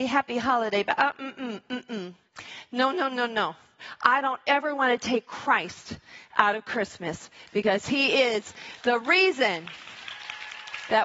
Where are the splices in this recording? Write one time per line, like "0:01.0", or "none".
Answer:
none